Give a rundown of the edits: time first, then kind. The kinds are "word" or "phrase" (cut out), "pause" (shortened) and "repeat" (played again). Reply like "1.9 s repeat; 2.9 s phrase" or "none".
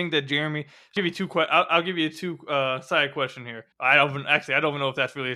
1.0 s phrase; 3.7 s pause